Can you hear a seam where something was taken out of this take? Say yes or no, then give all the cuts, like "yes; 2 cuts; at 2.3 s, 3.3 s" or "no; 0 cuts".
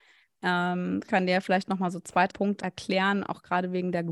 yes; 3 cuts; at 1.1 s, 2.3 s, 2.6 s